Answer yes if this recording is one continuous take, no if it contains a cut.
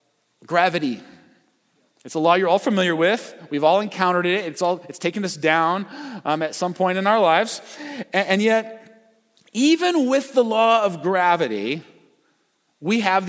yes